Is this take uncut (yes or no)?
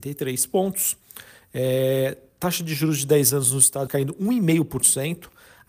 no